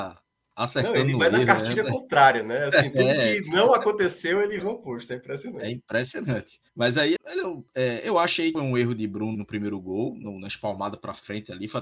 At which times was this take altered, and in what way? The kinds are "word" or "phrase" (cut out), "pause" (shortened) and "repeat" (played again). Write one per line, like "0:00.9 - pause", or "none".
0:04.6 - word
0:06.7 - pause
0:07.2 - word
0:08.5 - phrase
0:09.3 - word